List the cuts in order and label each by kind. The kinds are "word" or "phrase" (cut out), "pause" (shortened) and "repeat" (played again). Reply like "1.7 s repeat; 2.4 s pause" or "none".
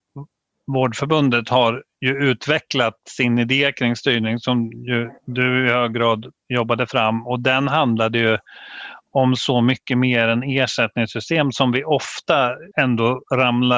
5.2 s pause; 12.7 s pause